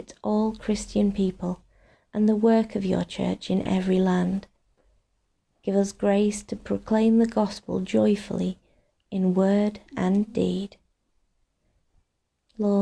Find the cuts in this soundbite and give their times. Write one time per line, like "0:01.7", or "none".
none